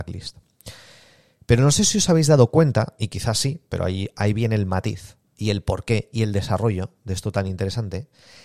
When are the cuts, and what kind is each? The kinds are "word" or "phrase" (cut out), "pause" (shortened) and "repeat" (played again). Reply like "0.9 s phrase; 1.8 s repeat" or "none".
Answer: 5.3 s pause

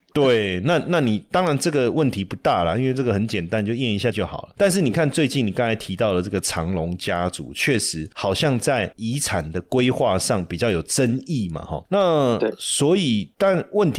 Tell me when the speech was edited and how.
4.1 s word

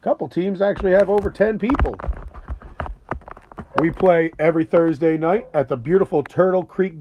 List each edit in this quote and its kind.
none

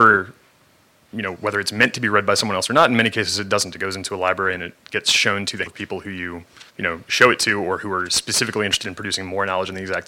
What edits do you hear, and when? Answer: 5.7 s word; 6.7 s pause

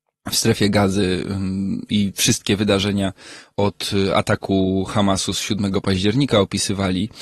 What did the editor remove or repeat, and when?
none

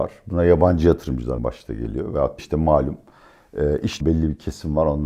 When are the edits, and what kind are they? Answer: 1.4 s word; 2.4 s word; 4.0 s phrase

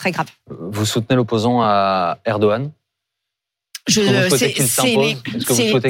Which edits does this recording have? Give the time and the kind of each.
none

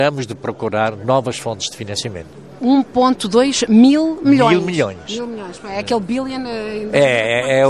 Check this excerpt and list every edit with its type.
none

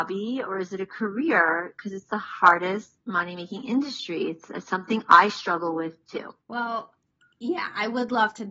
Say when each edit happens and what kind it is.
3.0 s pause; 6.4 s pause

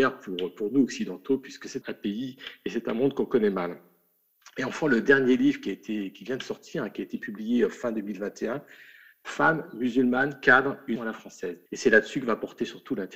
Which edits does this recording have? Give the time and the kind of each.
1.8 s word; 11.0 s word; 11.7 s pause

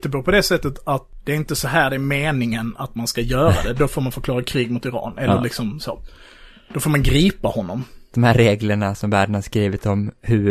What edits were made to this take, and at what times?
none

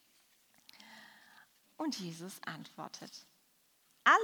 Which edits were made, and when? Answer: none

